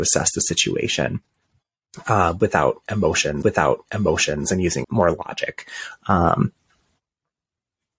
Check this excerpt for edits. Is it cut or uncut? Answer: cut